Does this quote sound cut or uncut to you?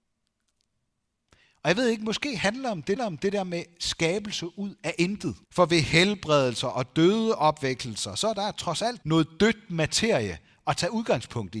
cut